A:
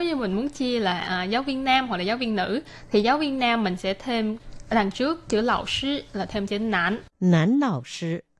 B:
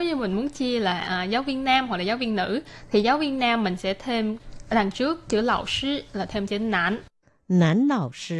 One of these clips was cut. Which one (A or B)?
A